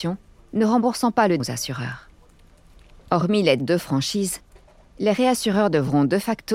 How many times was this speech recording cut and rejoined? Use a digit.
2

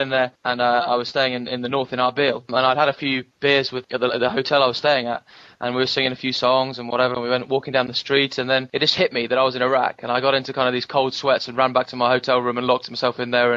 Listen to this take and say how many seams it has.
0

